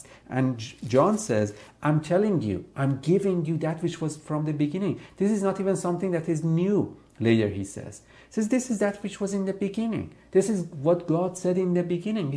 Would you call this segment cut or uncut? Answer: uncut